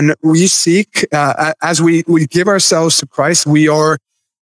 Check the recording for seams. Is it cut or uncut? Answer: uncut